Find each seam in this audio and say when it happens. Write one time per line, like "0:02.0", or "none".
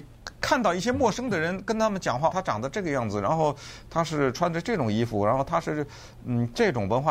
0:02.3